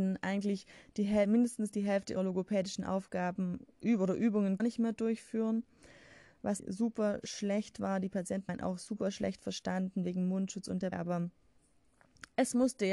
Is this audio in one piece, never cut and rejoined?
no; 5 cuts; at 2.2 s, 4.6 s, 6.6 s, 8.5 s, 10.9 s

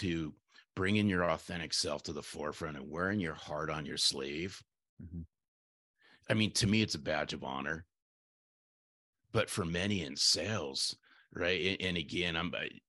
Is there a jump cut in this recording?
no; 0 cuts

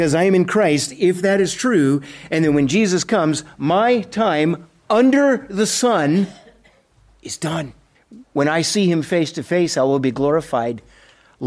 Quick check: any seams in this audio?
no; 0 cuts

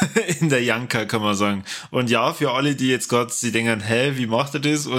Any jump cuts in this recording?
no; 0 cuts

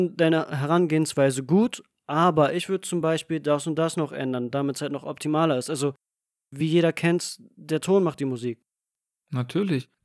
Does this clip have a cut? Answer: no; 0 cuts

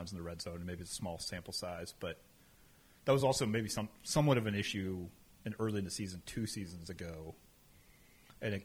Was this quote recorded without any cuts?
yes; 0 cuts

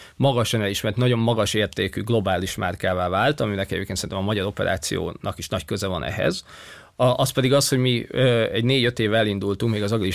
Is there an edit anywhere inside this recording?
no; 0 cuts

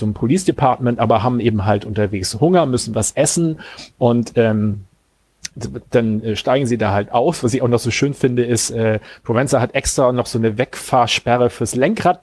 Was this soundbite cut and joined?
no; 0 cuts

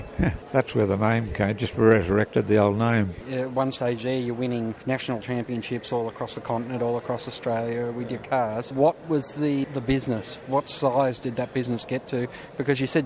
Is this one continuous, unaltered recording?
yes; 0 cuts

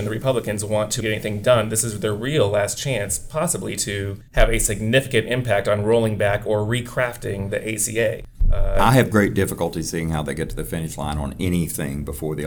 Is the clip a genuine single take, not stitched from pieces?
no; 2 cuts; at 1.0 s, 4.3 s

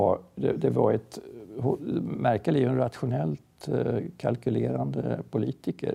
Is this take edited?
no; 0 cuts

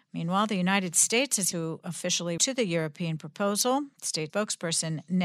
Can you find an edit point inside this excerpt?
yes; 3 cuts; at 1.5 s, 2.4 s, 4.3 s

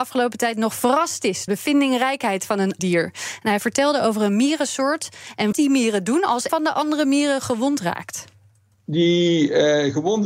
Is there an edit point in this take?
yes; 4 cuts; at 1.5 s, 2.8 s, 5.5 s, 6.5 s

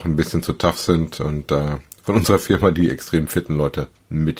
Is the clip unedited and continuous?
yes; 0 cuts

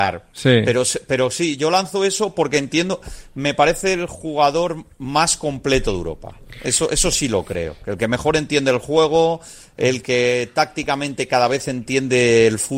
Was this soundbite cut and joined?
no; 0 cuts

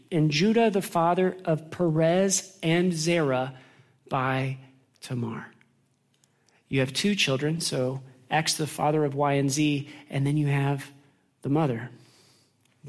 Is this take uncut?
yes; 0 cuts

